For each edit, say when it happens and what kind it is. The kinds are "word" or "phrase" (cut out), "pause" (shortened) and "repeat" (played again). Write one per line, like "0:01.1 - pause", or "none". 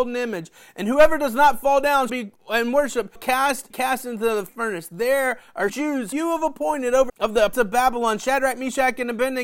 0:02.1 - word
0:03.2 - word
0:03.7 - word
0:04.5 - word
0:05.7 - word
0:06.1 - word
0:07.1 - word
0:07.5 - word